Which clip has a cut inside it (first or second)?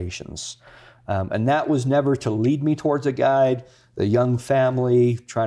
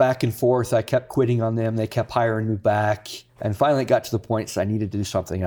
second